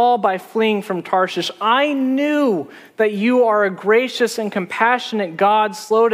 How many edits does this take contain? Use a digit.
0